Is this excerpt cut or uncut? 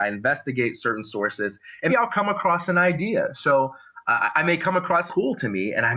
cut